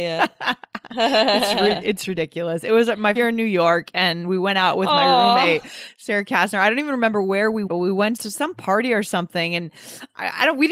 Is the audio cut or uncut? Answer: cut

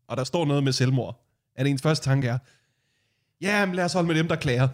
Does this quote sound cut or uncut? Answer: uncut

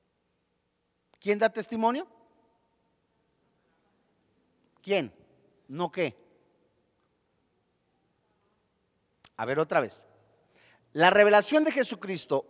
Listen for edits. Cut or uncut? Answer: uncut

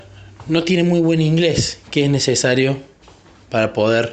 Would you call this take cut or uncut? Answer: uncut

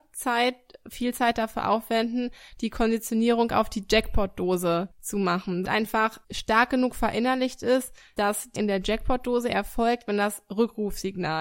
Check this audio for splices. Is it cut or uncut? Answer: cut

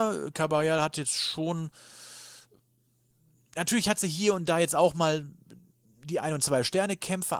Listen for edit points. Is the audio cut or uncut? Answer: uncut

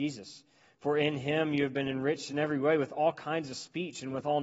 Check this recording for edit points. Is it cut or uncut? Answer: uncut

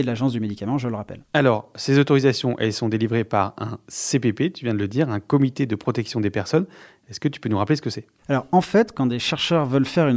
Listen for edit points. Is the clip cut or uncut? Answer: uncut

